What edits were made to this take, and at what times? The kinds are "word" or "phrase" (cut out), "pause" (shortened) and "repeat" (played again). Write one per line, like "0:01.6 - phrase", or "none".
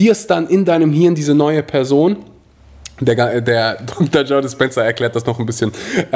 none